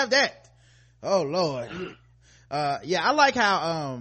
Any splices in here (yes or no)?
no